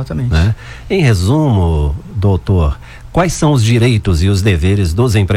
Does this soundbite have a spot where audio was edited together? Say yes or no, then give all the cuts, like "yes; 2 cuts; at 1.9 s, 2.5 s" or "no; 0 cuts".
no; 0 cuts